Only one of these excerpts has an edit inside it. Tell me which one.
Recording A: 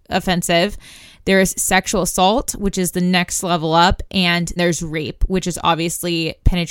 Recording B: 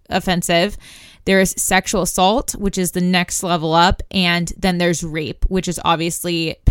A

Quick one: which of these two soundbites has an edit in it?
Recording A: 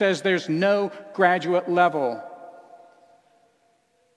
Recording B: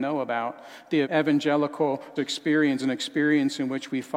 B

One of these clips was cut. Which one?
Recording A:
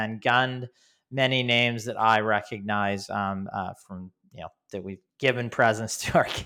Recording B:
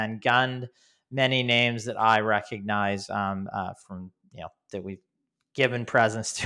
A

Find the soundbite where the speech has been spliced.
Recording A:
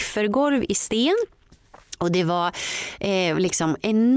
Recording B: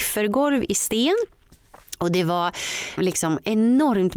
B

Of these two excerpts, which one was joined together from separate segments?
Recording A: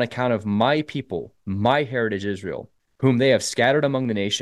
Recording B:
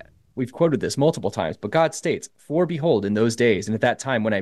A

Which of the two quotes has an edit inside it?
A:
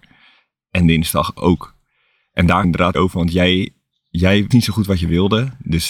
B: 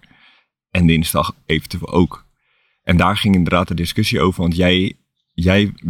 A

